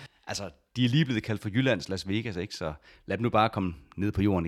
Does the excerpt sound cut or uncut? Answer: uncut